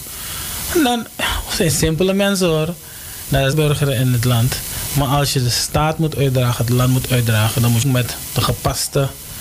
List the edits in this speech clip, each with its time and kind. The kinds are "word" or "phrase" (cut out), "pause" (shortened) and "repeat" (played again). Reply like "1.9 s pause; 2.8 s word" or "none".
3.5 s phrase; 7.8 s phrase